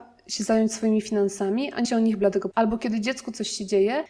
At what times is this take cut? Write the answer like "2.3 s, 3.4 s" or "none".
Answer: 1.8 s, 2.5 s